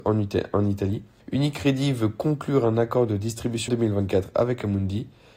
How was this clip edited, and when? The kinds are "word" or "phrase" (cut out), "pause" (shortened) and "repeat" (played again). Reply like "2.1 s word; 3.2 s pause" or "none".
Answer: 1.2 s pause; 3.7 s phrase